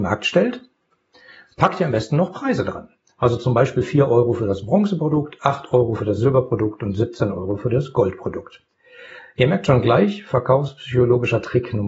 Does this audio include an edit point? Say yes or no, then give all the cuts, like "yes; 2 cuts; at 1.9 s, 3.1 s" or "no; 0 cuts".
no; 0 cuts